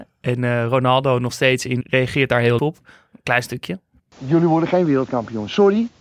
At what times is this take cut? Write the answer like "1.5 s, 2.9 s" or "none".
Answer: 1.8 s, 2.6 s, 4.0 s